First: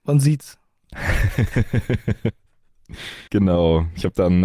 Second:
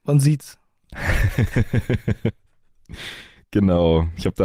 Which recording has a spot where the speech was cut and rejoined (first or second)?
first